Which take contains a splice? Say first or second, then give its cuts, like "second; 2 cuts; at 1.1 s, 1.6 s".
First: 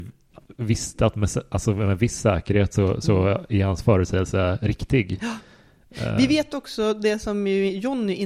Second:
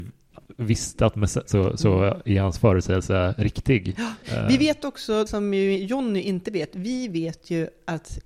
second; 3 cuts; at 1.5 s, 4.2 s, 5.3 s